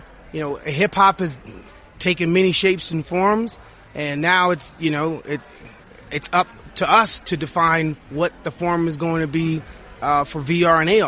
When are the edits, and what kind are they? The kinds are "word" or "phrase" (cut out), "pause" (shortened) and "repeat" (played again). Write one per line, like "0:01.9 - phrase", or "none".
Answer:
none